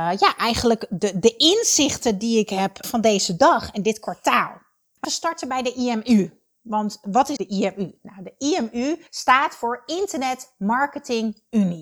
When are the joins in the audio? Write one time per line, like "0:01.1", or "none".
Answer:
0:02.8
0:05.0
0:07.4
0:09.1